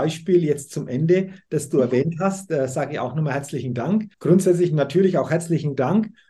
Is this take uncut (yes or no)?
no